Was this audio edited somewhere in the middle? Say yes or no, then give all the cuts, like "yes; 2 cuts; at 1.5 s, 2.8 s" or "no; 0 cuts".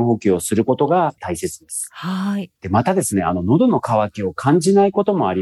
yes; 1 cut; at 2.6 s